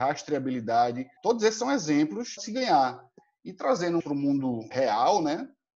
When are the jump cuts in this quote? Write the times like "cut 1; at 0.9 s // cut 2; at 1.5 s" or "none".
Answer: cut 1; at 1.2 s // cut 2; at 2.4 s // cut 3; at 4.0 s // cut 4; at 4.7 s